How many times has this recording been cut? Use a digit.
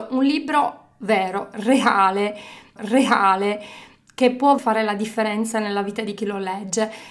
2